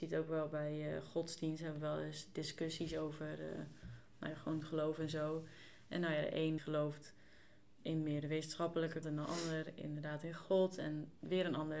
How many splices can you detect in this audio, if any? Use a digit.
3